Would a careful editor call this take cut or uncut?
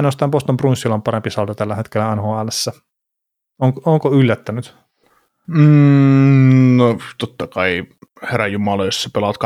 uncut